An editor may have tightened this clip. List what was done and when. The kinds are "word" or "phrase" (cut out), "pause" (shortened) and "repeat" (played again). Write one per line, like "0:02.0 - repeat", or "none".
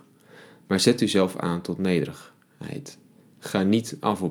none